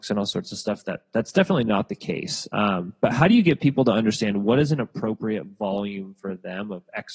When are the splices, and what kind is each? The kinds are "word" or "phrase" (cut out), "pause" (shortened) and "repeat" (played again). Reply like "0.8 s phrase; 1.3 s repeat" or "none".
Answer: none